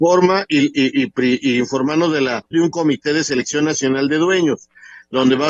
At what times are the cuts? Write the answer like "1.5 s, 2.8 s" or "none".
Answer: 2.5 s